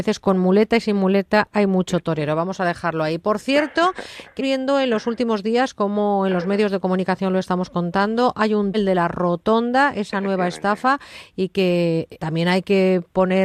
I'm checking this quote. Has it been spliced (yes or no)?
yes